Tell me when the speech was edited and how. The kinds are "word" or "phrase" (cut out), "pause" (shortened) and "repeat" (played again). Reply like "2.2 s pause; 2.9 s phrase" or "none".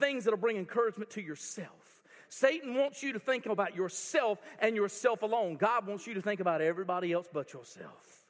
none